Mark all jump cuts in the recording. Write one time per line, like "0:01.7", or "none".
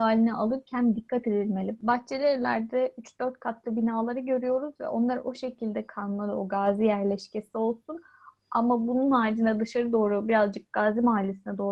none